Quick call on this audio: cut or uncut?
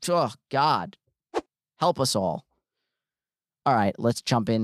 uncut